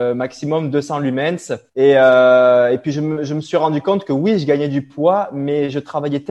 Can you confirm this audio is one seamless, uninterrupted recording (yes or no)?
no